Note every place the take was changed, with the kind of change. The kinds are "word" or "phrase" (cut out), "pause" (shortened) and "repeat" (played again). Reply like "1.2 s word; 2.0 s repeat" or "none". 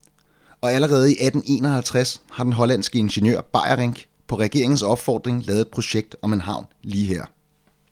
none